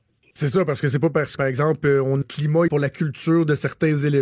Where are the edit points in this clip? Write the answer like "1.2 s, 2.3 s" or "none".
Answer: 1.4 s, 2.2 s, 2.7 s